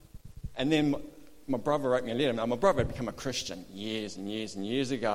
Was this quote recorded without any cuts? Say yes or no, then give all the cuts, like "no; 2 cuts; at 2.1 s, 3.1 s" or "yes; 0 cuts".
yes; 0 cuts